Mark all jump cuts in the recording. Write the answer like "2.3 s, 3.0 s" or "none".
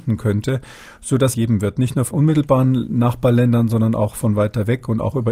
1.3 s, 2.1 s